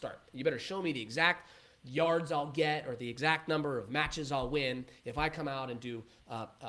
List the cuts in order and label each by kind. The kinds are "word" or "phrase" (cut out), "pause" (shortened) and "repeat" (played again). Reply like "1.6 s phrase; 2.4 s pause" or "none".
none